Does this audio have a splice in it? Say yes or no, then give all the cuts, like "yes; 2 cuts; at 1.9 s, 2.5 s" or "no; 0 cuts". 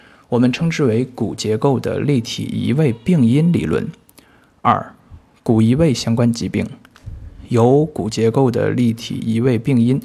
no; 0 cuts